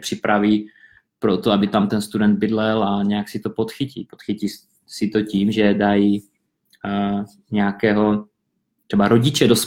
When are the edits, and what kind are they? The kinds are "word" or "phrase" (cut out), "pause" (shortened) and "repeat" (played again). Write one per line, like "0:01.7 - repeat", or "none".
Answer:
none